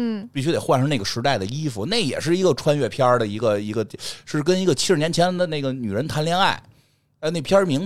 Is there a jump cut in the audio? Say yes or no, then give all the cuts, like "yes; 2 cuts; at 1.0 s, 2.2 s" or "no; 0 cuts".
no; 0 cuts